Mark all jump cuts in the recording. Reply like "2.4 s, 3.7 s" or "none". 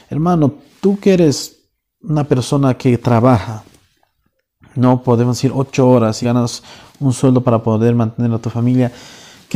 6.2 s